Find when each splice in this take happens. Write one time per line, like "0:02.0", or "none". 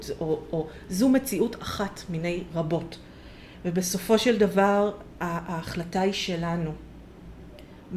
none